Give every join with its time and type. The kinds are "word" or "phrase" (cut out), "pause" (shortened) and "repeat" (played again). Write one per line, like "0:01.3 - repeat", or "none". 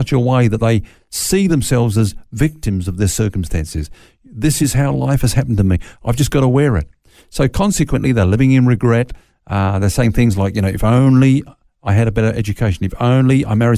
none